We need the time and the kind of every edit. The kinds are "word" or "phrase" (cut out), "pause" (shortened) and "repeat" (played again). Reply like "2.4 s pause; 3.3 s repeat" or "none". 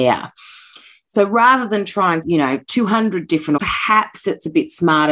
2.2 s word; 3.6 s word